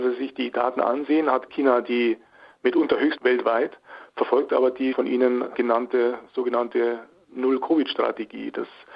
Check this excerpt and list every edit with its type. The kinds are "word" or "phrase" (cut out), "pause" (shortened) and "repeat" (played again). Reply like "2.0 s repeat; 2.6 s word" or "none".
3.2 s word; 4.9 s word